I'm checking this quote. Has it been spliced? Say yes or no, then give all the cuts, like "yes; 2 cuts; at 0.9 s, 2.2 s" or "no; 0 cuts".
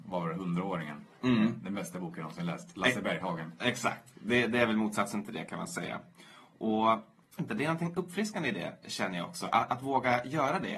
yes; 2 cuts; at 7.4 s, 9.7 s